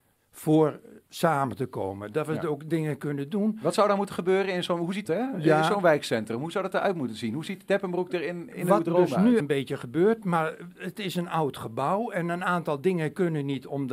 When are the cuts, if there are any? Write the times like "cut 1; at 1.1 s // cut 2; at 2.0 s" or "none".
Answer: cut 1; at 1.0 s // cut 2; at 5.0 s // cut 3; at 8.5 s // cut 4; at 9.4 s